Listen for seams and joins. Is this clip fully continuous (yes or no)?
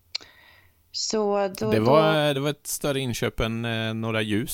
yes